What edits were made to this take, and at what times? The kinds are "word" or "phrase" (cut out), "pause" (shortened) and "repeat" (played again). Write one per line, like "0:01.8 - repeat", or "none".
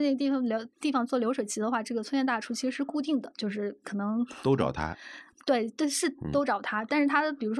none